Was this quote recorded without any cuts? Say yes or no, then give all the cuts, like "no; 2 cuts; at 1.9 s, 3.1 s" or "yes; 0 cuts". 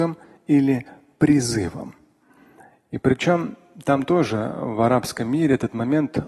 yes; 0 cuts